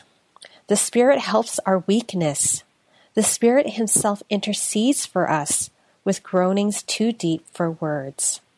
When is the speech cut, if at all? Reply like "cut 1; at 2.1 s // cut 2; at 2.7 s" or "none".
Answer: none